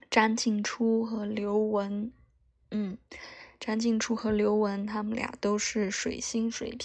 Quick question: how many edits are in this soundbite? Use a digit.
0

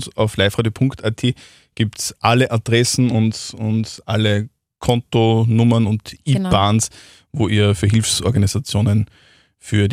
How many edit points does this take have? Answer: 0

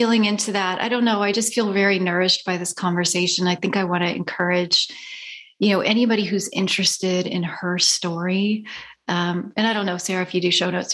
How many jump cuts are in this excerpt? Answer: 0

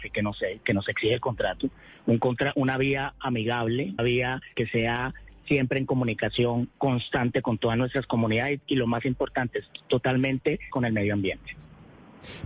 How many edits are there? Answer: 3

